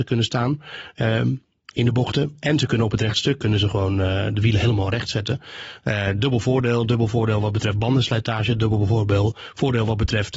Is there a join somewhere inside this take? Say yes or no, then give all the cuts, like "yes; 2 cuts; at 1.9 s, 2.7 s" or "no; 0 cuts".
no; 0 cuts